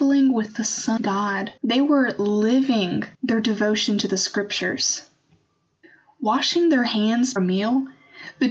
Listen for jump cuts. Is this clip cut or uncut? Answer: cut